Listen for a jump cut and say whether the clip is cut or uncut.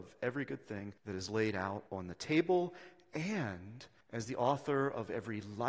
cut